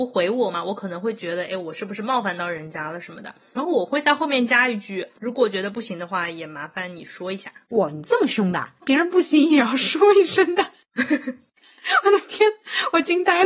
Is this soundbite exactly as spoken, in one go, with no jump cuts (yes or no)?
no